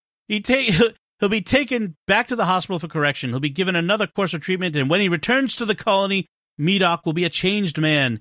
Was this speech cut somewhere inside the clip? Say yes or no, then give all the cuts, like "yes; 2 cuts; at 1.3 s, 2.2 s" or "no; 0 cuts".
no; 0 cuts